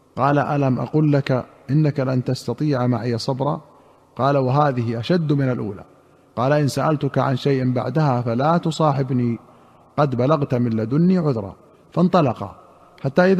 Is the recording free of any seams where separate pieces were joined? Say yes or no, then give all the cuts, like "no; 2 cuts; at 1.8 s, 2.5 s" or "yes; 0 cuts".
yes; 0 cuts